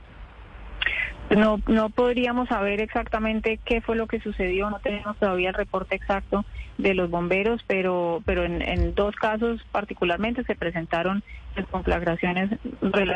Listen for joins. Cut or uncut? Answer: uncut